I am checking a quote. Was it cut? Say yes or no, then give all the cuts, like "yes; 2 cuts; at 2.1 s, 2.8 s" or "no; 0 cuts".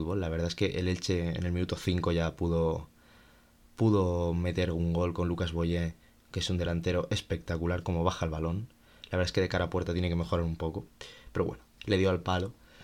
no; 0 cuts